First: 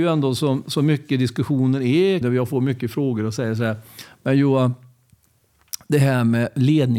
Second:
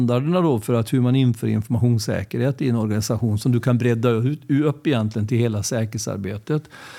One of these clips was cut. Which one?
first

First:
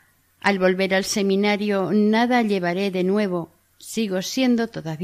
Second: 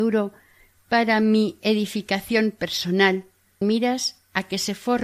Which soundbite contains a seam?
second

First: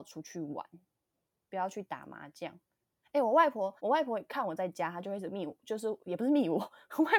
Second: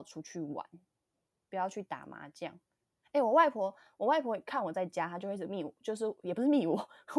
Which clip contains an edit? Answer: first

